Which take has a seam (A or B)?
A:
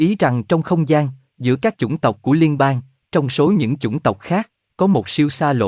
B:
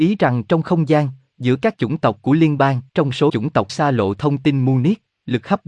B